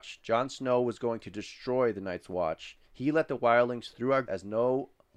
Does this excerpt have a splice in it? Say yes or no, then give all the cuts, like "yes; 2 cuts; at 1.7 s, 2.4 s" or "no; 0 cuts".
yes; 2 cuts; at 2.8 s, 4.3 s